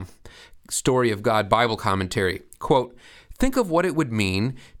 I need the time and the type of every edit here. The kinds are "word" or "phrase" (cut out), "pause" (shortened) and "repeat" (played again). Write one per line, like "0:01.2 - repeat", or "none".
none